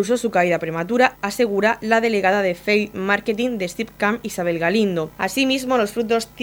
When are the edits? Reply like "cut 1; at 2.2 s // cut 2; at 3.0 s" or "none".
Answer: cut 1; at 4.2 s